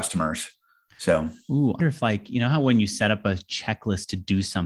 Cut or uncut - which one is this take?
cut